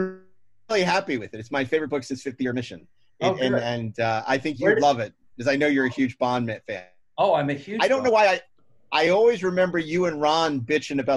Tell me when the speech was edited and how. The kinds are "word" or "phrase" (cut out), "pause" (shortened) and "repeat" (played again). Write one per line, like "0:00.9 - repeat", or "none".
none

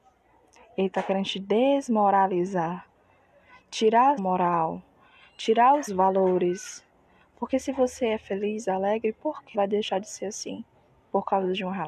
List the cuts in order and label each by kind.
0:04.2 - word
0:05.9 - word
0:09.5 - word

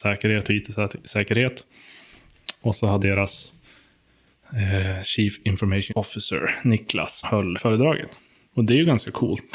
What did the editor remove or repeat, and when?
0:03.0 - word
0:05.9 - word
0:07.2 - word
0:07.6 - word

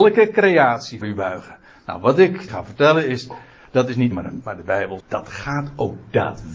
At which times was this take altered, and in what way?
0:01.0 - word
0:02.5 - word
0:04.1 - word
0:04.4 - word
0:05.0 - word

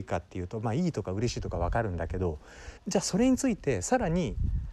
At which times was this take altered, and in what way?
0:02.8 - pause

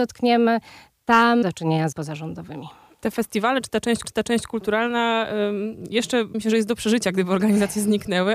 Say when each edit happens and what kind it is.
0:01.4 - word
0:01.9 - word
0:04.0 - repeat
0:06.3 - word

